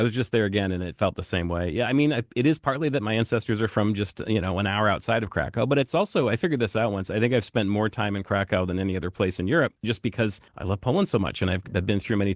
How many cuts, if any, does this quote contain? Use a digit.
1